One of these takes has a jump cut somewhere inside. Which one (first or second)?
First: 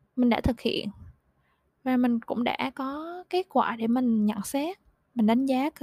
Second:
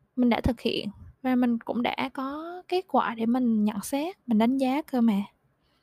second